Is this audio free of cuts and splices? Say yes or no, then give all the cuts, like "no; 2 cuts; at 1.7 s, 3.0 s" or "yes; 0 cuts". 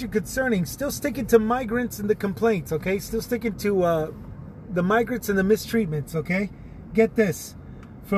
no; 1 cut; at 3.5 s